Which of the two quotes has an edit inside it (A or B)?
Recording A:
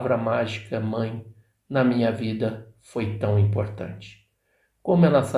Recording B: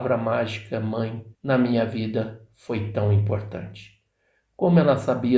B